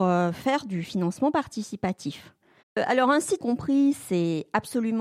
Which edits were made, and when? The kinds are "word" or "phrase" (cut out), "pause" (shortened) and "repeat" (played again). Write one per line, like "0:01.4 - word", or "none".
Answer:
0:02.6 - pause
0:03.4 - phrase